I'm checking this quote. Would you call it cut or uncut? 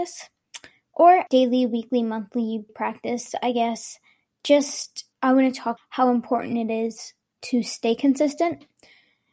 cut